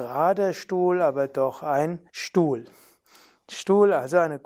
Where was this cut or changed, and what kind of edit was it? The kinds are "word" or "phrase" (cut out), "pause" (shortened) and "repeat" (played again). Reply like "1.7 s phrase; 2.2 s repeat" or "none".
2.1 s pause